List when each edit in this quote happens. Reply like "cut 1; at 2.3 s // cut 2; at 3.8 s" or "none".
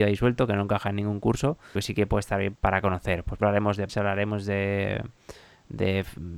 cut 1; at 1.8 s // cut 2; at 2.6 s // cut 3; at 3.4 s // cut 4; at 3.9 s